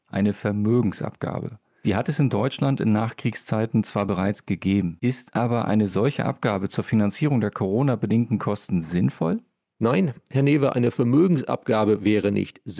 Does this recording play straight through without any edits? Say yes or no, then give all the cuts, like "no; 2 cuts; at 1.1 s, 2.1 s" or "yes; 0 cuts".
yes; 0 cuts